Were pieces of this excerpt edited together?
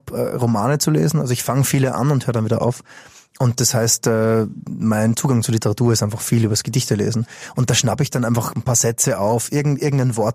no; 0 cuts

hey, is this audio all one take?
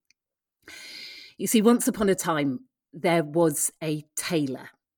yes; 0 cuts

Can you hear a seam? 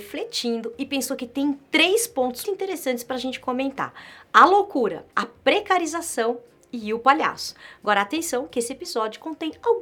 yes; 2 cuts; at 2.4 s, 5.1 s

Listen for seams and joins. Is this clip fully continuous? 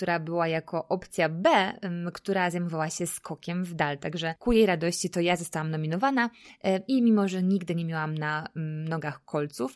yes; 0 cuts

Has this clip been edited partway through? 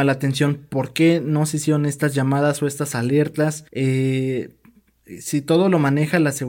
yes; 1 cut; at 3.7 s

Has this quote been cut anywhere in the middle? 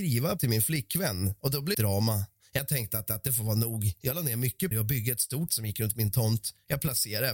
yes; 4 cuts; at 1.7 s, 3.1 s, 4.7 s, 5.5 s

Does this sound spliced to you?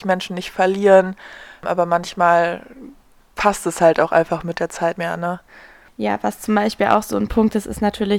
yes; 1 cut; at 5.0 s

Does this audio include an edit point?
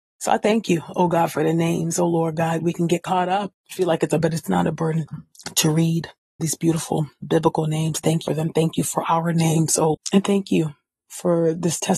yes; 6 cuts; at 3.5 s, 4.2 s, 6.4 s, 7.2 s, 8.3 s, 9.9 s

